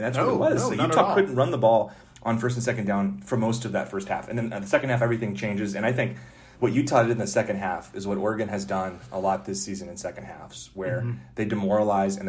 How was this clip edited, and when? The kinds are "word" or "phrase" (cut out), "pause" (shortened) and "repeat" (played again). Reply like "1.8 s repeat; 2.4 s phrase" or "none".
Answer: 6.5 s pause